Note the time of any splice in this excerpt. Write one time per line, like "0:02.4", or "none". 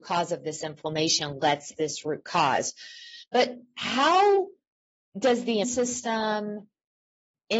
0:01.8
0:05.6